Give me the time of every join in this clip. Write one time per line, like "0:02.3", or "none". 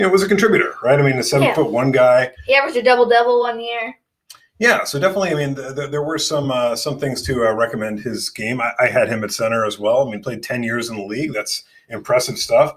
none